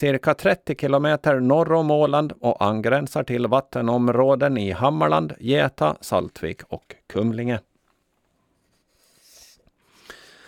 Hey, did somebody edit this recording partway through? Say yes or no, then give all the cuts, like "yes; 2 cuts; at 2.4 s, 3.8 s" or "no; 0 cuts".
no; 0 cuts